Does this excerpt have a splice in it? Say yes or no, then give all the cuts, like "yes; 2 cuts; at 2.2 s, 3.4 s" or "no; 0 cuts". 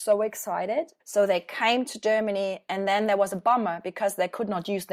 yes; 1 cut; at 1.0 s